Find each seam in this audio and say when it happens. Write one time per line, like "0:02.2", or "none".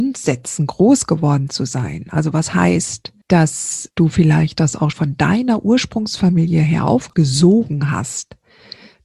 0:03.2
0:04.9